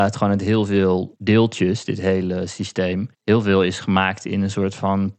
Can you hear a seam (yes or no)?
yes